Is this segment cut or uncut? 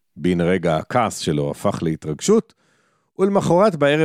uncut